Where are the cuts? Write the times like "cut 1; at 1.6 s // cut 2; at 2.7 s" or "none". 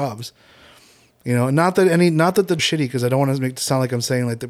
cut 1; at 2.6 s